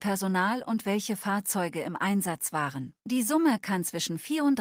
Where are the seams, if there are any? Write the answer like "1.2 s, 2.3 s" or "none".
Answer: 3.0 s